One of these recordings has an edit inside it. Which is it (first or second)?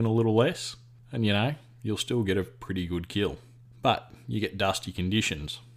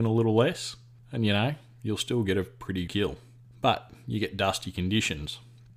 second